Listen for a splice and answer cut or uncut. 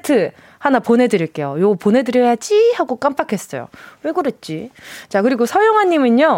uncut